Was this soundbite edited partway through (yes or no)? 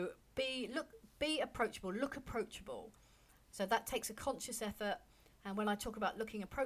no